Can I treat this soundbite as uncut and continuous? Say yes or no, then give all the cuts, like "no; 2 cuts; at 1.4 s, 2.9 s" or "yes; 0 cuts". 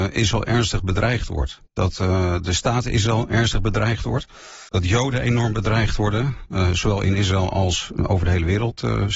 no; 2 cuts; at 1.7 s, 4.7 s